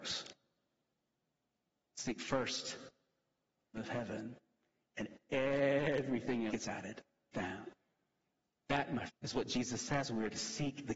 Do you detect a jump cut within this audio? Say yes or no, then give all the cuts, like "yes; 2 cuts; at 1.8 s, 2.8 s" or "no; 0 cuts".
yes; 4 cuts; at 3.7 s, 6.5 s, 7.3 s, 9.1 s